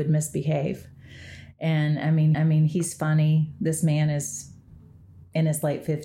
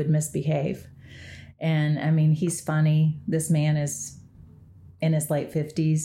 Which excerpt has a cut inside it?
first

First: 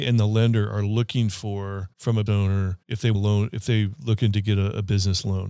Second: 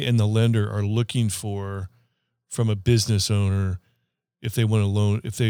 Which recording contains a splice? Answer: first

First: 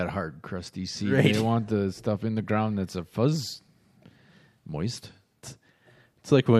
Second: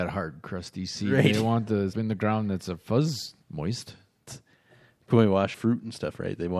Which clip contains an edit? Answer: second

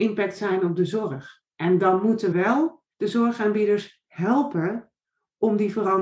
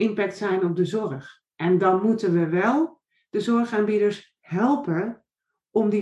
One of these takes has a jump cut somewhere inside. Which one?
first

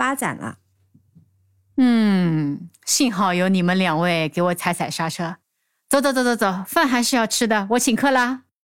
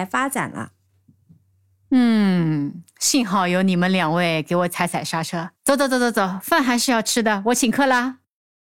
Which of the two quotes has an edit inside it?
second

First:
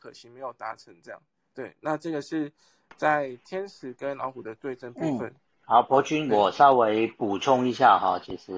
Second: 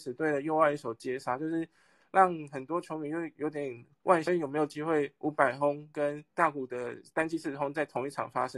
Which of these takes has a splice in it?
second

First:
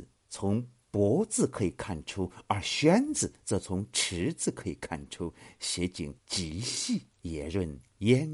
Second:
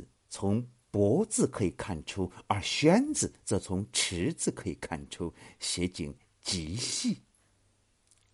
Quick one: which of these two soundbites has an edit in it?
first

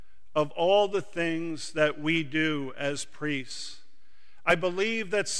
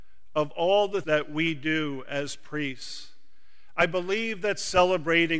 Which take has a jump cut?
second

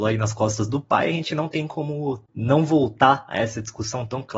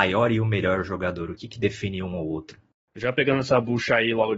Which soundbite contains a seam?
first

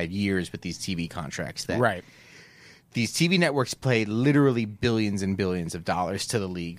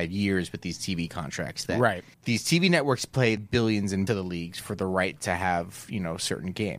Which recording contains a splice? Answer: second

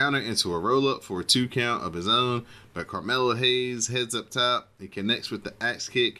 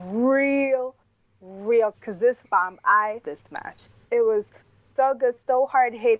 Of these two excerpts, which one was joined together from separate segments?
second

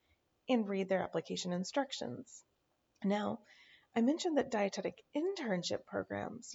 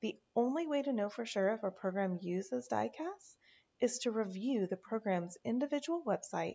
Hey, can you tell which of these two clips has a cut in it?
first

